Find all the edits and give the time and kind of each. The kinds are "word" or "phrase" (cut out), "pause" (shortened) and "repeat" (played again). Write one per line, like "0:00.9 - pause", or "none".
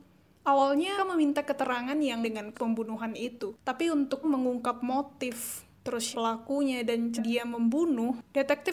0:01.0 - word
0:02.2 - word
0:02.5 - word
0:04.2 - word
0:06.1 - word
0:07.2 - word